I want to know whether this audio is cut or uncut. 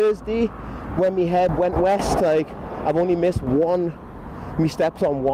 uncut